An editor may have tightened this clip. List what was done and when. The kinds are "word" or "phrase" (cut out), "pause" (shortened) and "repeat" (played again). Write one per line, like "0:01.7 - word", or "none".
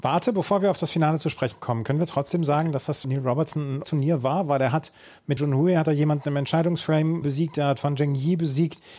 0:03.0 - word
0:03.8 - word
0:05.4 - word
0:07.2 - word